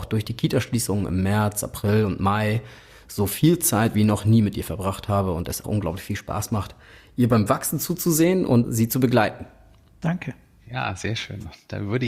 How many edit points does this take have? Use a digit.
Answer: 2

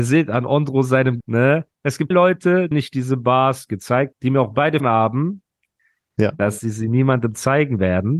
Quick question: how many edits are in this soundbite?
5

